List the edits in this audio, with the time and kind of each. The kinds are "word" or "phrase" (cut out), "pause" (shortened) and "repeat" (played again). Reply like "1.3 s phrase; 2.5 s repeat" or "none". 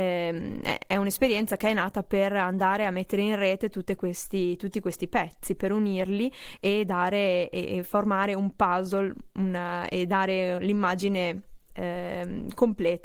none